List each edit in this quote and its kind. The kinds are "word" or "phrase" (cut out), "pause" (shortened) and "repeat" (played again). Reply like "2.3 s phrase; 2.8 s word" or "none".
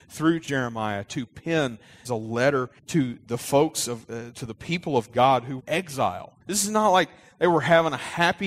2.0 s phrase; 2.8 s pause; 5.6 s phrase; 6.4 s pause